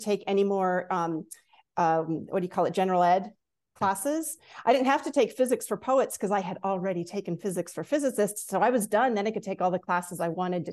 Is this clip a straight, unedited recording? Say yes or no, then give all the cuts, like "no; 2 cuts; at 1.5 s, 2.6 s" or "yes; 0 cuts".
yes; 0 cuts